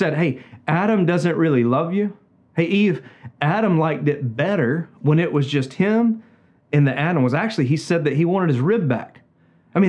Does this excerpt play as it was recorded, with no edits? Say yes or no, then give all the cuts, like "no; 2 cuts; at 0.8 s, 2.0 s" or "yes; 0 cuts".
yes; 0 cuts